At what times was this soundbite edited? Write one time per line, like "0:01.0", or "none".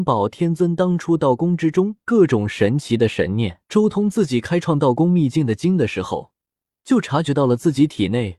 0:03.6